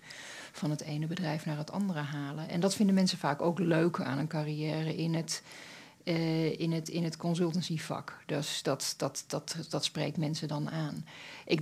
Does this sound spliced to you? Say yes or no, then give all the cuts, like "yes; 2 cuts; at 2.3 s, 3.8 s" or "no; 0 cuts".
no; 0 cuts